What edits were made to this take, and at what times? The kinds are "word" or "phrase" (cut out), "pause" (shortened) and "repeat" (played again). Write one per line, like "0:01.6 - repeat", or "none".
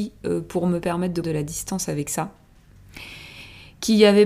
0:01.2 - word